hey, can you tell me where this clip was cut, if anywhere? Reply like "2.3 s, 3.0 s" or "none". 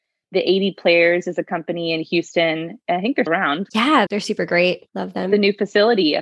3.3 s, 4.1 s, 4.9 s